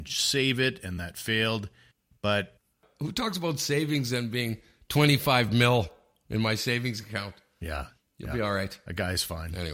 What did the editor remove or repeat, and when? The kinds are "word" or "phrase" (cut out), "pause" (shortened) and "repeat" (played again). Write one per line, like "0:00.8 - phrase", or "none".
none

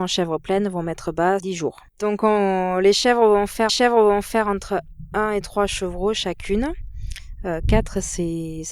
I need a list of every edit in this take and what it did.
0:01.4 - phrase
0:01.9 - pause
0:03.7 - repeat

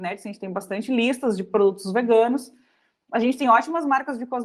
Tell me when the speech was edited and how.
none

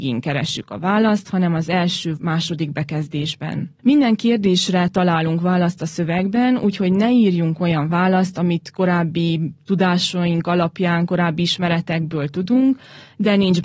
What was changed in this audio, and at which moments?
0:02.2 - word
0:03.8 - pause

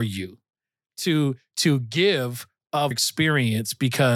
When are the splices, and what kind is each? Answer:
0:02.9 - word

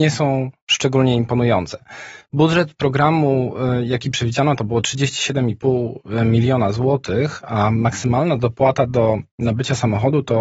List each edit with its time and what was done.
none

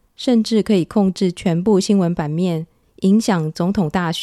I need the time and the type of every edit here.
none

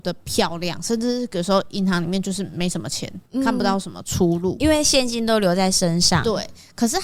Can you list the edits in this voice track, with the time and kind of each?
0:03.3 - pause

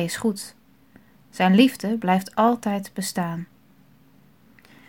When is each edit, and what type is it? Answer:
none

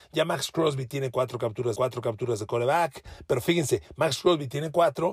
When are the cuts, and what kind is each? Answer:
0:01.8 - repeat

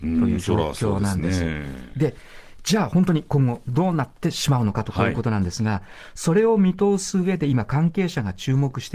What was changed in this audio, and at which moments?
none

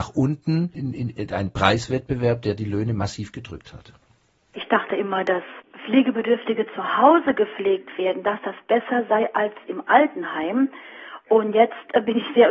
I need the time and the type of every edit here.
none

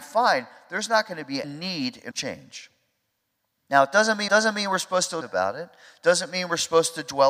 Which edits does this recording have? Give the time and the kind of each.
0:01.4 - word
0:02.1 - phrase
0:04.3 - repeat
0:05.2 - word

